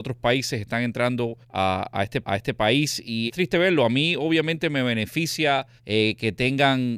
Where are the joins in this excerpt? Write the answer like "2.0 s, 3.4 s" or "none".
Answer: 1.4 s, 2.2 s, 3.3 s, 5.8 s